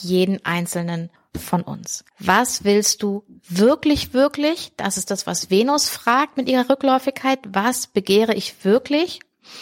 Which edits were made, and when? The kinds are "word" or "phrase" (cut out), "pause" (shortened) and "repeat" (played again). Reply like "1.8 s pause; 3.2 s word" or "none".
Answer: 1.2 s pause; 2.1 s pause